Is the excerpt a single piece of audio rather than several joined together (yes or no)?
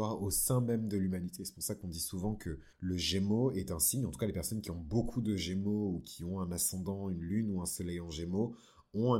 no